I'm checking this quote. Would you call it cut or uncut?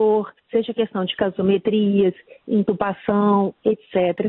uncut